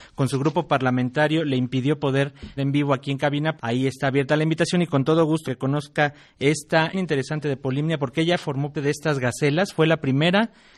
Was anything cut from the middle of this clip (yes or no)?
yes